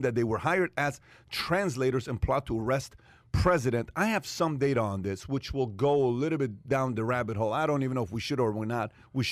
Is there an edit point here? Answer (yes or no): no